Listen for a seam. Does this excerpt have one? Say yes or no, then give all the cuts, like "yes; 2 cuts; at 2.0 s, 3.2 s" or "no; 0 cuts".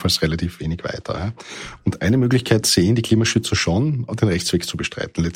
no; 0 cuts